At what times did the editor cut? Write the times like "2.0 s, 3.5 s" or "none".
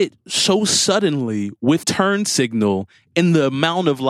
1.8 s